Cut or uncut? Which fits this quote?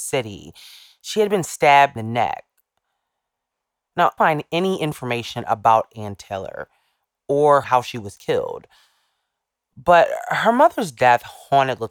cut